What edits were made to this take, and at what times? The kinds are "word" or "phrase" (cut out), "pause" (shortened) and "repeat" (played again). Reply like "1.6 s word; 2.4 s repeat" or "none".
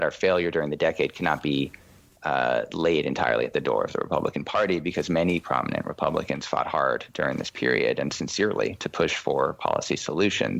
none